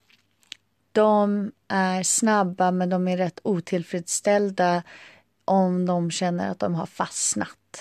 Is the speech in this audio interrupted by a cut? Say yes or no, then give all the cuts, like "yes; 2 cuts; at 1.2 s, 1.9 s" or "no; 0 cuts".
no; 0 cuts